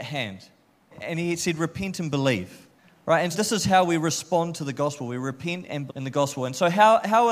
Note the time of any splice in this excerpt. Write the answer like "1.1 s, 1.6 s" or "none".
0.9 s, 2.8 s, 3.3 s, 5.9 s